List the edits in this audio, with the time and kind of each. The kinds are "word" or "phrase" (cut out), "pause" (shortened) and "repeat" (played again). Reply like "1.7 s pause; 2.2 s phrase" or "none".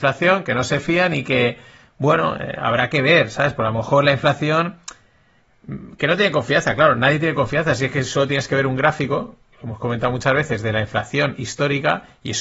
none